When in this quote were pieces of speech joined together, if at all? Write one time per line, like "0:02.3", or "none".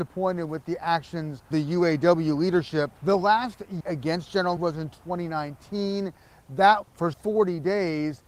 0:01.5
0:03.0
0:03.8
0:04.6
0:06.8
0:07.1